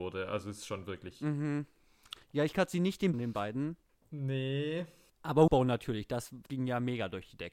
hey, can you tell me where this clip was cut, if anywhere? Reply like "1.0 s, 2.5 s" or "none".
2.2 s, 2.5 s, 3.1 s, 5.5 s, 6.5 s